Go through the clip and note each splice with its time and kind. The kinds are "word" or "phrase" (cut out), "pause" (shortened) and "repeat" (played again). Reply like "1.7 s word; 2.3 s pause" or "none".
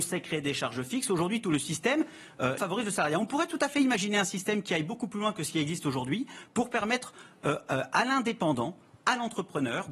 2.6 s word

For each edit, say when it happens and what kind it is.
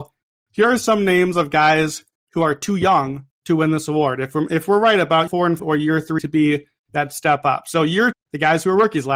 5.3 s word; 5.6 s word; 6.2 s word; 8.1 s word

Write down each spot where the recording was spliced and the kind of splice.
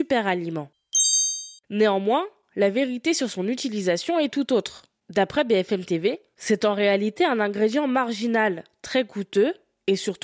1.6 s pause

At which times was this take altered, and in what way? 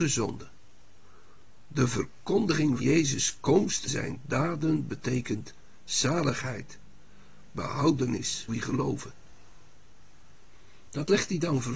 2.8 s word; 3.9 s word; 8.5 s word

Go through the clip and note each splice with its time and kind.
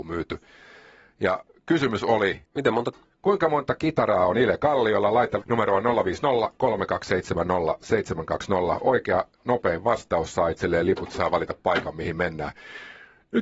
2.5 s pause; 2.9 s phrase; 5.4 s word

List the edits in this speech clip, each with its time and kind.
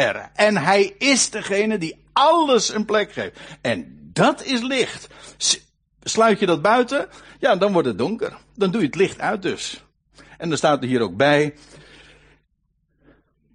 none

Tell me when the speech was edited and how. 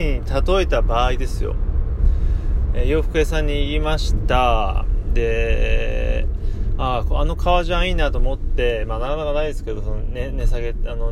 none

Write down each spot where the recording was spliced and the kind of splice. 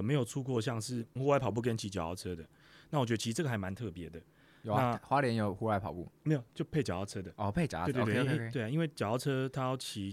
none

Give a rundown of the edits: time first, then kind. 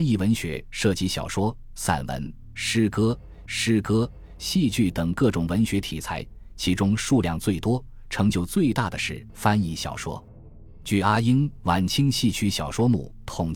3.5 s repeat

